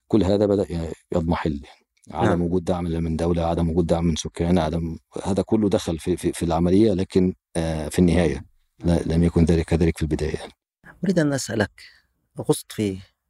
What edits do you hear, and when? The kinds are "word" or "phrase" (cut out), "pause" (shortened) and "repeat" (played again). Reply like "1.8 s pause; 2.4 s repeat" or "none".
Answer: none